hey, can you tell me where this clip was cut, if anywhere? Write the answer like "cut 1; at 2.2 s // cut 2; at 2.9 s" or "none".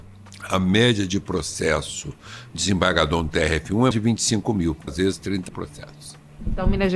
cut 1; at 2.5 s // cut 2; at 3.9 s // cut 3; at 4.9 s // cut 4; at 5.5 s